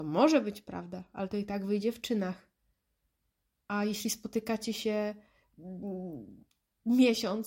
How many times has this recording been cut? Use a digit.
0